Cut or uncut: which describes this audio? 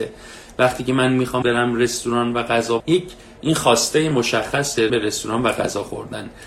cut